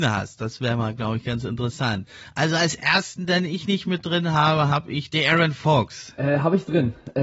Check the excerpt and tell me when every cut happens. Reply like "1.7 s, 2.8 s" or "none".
none